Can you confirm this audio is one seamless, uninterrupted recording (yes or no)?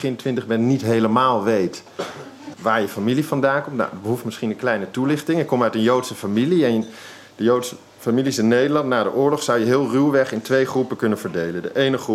no